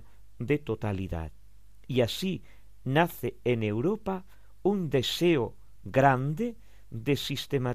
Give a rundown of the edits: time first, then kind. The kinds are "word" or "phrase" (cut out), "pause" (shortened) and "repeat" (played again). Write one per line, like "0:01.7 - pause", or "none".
none